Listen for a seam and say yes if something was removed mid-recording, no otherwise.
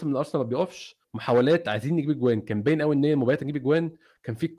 yes